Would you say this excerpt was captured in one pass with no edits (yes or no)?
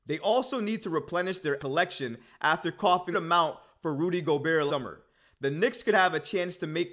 no